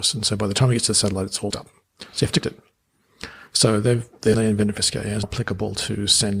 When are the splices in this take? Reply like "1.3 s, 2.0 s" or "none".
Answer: 1.5 s, 2.4 s, 4.3 s, 4.8 s, 5.2 s

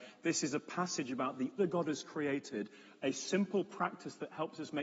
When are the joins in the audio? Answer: 1.6 s

